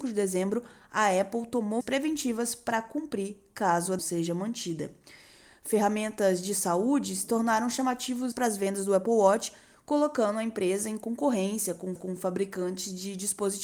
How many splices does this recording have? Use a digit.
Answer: 4